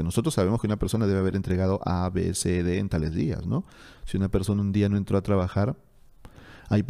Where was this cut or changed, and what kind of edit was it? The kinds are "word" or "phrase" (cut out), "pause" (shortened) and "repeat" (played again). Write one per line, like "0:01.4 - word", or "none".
none